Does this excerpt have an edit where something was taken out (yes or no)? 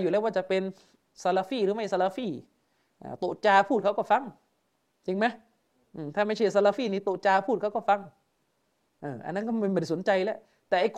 yes